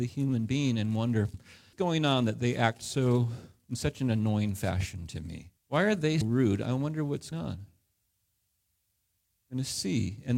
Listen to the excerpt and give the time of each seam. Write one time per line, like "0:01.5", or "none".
0:01.3
0:01.7
0:05.6
0:06.2
0:07.3